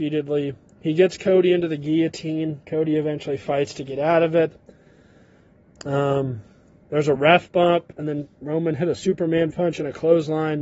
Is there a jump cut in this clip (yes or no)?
no